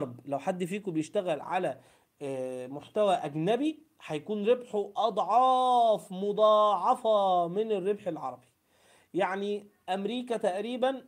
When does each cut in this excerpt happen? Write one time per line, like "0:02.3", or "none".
none

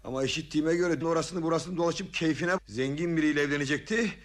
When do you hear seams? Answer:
0:01.0
0:02.6

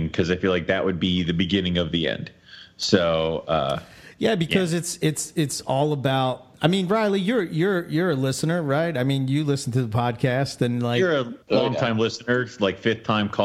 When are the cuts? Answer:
0:06.5
0:11.4

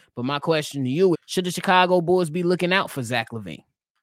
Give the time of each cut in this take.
0:01.1

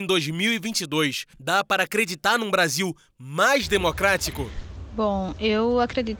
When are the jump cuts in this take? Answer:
0:01.3

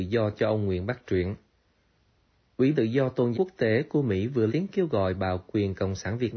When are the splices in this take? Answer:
0:02.7
0:03.3
0:04.5

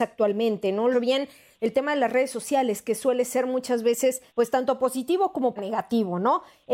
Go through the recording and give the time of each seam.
0:00.9
0:04.3
0:05.6

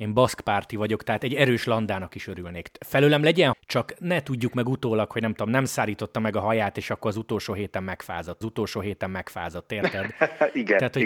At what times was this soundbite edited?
0:03.5
0:08.4

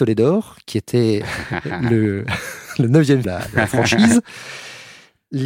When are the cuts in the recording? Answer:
0:03.2

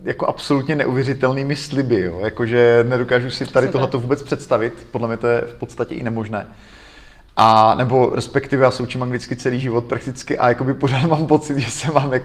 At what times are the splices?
none

